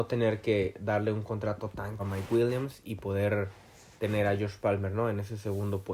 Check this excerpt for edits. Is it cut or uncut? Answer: cut